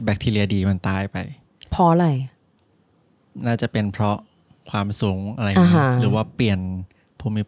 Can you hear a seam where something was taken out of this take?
no; 0 cuts

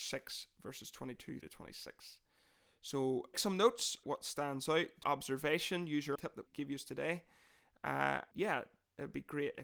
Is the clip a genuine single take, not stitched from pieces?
no; 7 cuts; at 1.4 s, 3.3 s, 4.0 s, 5.0 s, 6.2 s, 6.5 s, 8.3 s

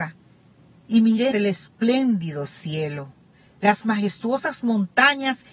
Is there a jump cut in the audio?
yes; 2 cuts; at 1.3 s, 3.3 s

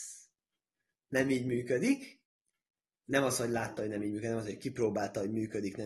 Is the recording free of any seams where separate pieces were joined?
yes; 0 cuts

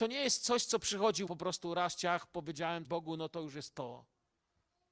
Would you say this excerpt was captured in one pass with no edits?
no; 2 cuts; at 1.3 s, 2.8 s

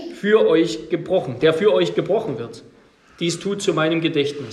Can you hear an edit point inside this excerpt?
no; 0 cuts

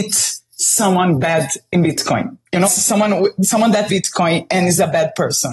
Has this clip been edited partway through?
yes; 2 cuts; at 2.6 s, 3.9 s

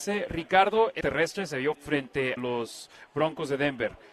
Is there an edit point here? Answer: yes; 3 cuts; at 1.0 s, 1.7 s, 2.4 s

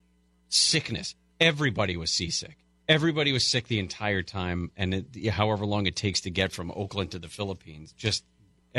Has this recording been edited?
no; 0 cuts

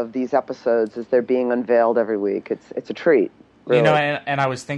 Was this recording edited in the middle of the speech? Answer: no; 0 cuts

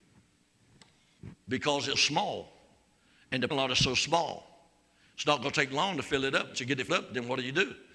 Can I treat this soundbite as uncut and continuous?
no; 4 cuts; at 1.9 s, 3.5 s, 6.5 s, 6.9 s

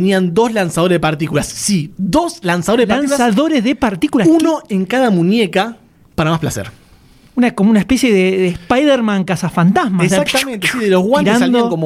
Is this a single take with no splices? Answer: yes; 0 cuts

